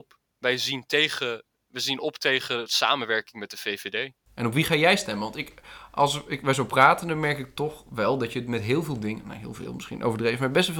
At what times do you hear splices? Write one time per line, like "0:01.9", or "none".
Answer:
none